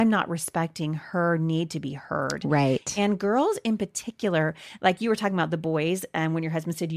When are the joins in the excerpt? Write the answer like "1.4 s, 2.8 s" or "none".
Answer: none